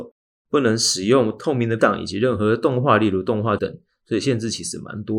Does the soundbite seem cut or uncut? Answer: cut